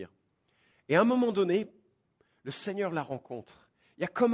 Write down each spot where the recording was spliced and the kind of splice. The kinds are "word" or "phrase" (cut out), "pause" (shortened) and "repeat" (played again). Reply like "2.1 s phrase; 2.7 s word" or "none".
none